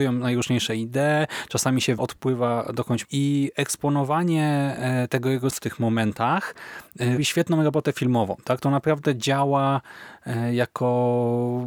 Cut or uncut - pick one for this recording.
cut